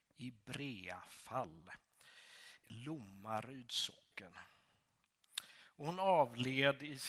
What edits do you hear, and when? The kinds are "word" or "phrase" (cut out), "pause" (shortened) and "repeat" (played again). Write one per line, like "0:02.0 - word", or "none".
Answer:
0:02.6 - word